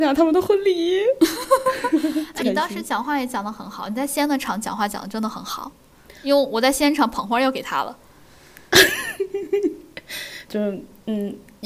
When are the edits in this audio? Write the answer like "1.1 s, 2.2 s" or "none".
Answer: 2.4 s, 10.5 s